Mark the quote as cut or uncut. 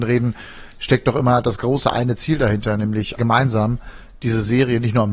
cut